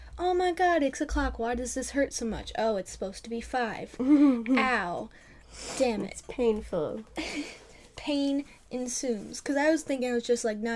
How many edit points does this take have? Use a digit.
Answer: 1